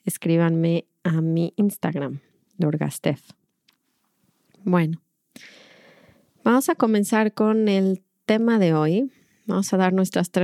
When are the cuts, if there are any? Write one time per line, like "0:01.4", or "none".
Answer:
none

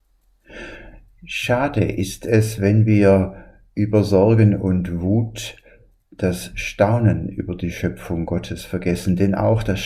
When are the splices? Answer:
none

